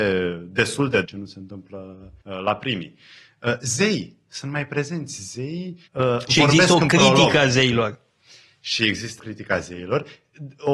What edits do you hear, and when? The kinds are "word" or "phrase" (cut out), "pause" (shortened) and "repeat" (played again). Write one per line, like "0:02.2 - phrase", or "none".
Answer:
0:01.0 - phrase
0:02.2 - pause
0:05.9 - pause
0:09.2 - phrase